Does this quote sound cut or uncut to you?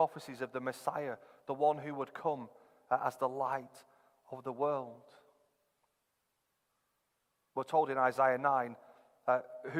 uncut